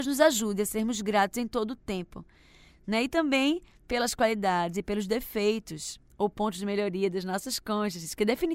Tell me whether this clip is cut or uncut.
uncut